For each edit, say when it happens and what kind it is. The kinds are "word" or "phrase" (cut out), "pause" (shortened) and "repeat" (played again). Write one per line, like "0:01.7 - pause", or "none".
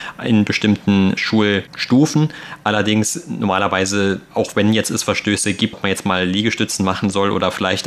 0:01.2 - word
0:05.7 - word